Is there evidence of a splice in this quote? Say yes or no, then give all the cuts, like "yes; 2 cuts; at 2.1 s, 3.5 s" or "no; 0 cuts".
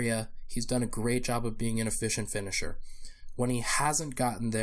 no; 0 cuts